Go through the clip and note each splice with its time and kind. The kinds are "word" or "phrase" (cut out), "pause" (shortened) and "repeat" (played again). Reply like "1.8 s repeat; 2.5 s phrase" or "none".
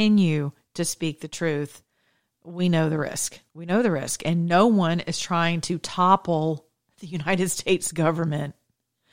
3.5 s pause